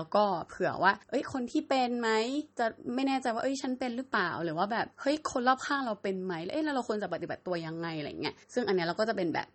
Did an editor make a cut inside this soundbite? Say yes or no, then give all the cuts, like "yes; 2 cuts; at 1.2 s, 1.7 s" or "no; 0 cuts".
yes; 4 cuts; at 1.0 s, 2.5 s, 4.9 s, 8.4 s